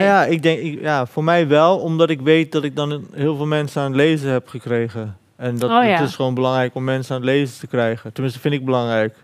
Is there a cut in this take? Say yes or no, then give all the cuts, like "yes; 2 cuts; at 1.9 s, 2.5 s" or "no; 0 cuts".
no; 0 cuts